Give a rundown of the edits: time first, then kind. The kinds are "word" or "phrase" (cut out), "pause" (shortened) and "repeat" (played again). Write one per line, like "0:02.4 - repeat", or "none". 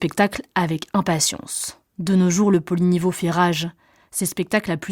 0:01.9 - pause

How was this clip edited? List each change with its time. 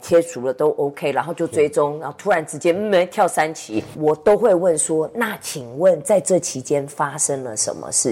0:03.9 - word

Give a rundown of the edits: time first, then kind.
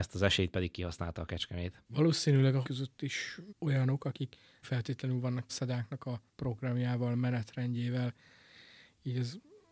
0:01.8 - pause
0:02.6 - word
0:03.5 - word
0:04.6 - word
0:05.5 - word
0:06.3 - pause

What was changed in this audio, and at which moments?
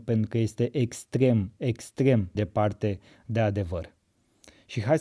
0:02.3 - word

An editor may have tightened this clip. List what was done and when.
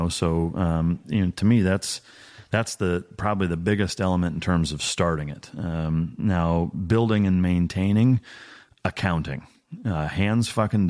none

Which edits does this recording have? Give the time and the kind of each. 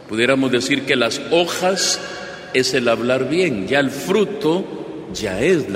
none

